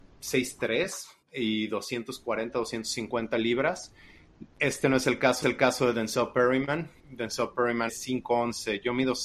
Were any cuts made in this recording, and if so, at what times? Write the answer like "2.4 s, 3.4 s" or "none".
1.2 s, 4.5 s, 5.4 s, 7.0 s, 7.9 s